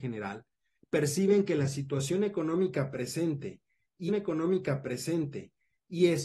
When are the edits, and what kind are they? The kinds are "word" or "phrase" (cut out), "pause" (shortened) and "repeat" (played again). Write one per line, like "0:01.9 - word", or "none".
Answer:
0:04.1 - repeat